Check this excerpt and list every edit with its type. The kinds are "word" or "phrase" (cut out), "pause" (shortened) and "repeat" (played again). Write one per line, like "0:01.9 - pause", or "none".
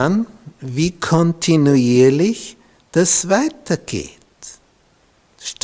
none